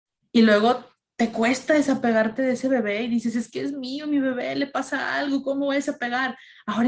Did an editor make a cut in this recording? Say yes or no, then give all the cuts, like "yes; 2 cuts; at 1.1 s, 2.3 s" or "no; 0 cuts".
no; 0 cuts